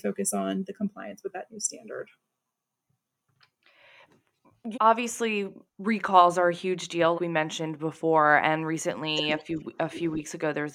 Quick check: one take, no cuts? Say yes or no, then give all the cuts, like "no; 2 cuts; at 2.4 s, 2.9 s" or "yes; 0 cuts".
no; 3 cuts; at 4.7 s, 5.7 s, 7.1 s